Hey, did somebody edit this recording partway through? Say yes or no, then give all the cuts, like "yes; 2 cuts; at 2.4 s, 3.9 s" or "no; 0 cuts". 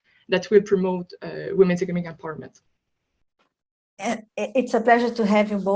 yes; 1 cut; at 4.3 s